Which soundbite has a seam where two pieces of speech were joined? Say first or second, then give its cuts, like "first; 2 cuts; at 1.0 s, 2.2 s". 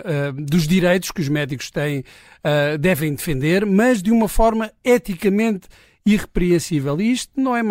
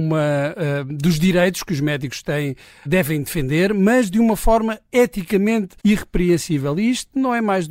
second; 2 cuts; at 2.9 s, 5.8 s